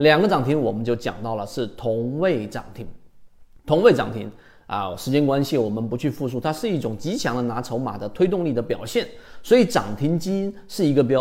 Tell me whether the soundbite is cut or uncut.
uncut